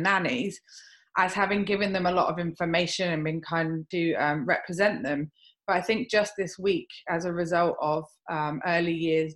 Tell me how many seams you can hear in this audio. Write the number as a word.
one